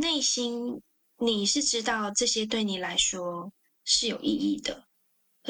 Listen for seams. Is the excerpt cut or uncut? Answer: cut